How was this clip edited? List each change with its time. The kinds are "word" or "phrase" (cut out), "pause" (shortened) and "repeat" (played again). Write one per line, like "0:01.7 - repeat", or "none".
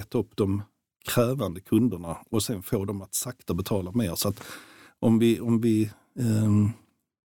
none